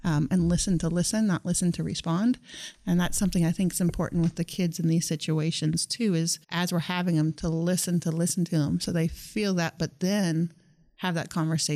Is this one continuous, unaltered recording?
no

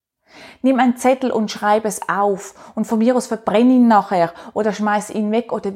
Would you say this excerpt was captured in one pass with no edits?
yes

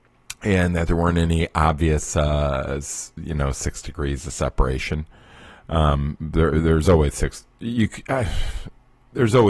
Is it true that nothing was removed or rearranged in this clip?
yes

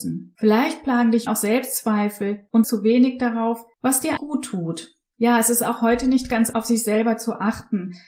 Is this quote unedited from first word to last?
no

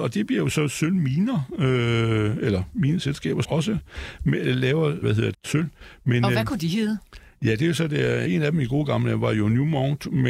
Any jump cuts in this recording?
yes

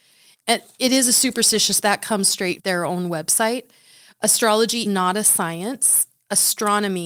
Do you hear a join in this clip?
yes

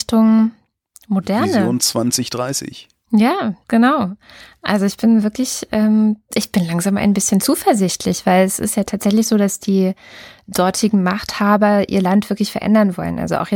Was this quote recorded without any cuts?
yes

